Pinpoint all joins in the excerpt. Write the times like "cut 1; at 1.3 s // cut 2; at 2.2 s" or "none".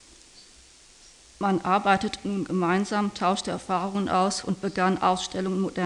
none